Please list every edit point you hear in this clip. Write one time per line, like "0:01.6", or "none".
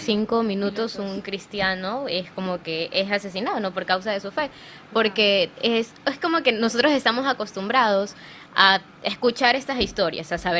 0:05.5